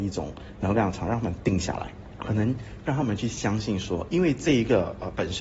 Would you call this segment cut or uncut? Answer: cut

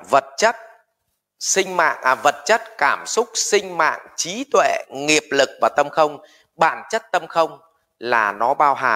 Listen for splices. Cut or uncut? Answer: uncut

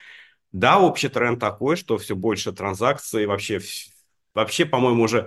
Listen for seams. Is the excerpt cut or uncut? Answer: uncut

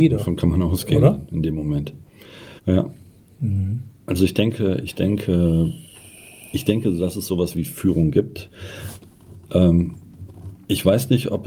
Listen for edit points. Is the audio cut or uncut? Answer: cut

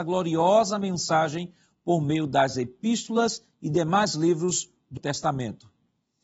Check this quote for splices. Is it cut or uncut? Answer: cut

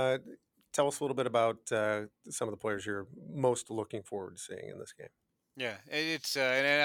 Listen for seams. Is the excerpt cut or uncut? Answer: uncut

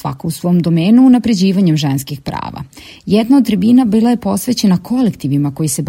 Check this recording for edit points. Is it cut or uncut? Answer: uncut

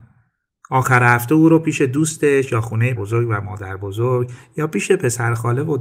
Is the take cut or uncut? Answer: cut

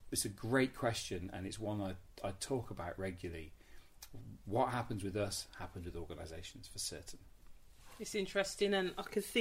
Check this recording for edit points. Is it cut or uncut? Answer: uncut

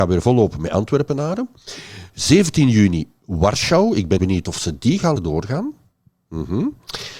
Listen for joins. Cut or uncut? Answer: cut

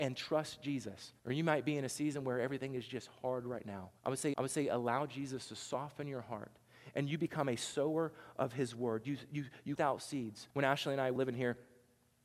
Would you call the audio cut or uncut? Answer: cut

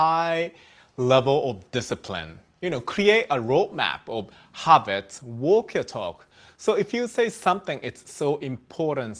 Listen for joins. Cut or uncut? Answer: uncut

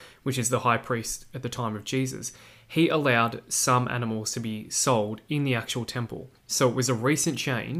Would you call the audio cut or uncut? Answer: cut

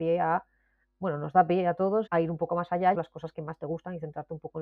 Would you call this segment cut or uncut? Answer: cut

